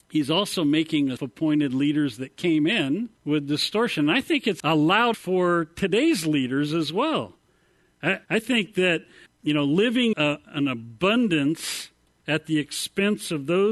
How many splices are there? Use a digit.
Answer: 7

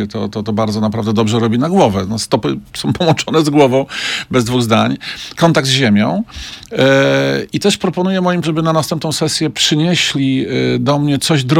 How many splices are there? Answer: 1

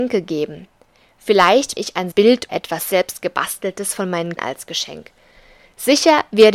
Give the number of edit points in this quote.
4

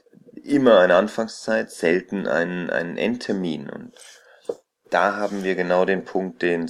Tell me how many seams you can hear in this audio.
0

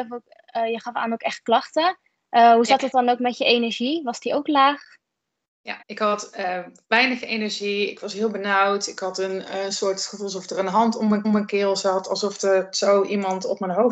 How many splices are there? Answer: 2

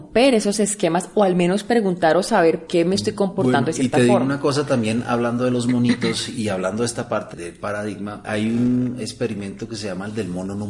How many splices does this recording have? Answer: 3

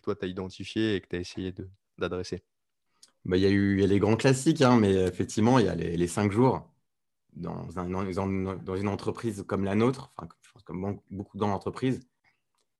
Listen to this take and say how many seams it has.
0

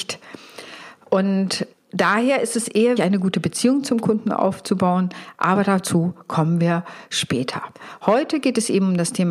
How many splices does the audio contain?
2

